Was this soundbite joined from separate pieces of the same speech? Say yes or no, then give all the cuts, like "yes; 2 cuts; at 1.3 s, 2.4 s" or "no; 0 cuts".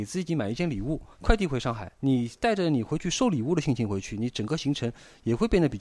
yes; 2 cuts; at 1.1 s, 2.0 s